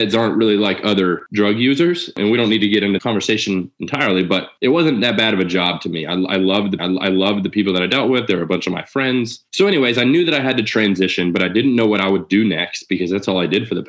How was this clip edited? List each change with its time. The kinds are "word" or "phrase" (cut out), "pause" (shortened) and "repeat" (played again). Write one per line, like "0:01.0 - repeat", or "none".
0:03.0 - word
0:04.6 - pause
0:06.8 - repeat
0:09.5 - pause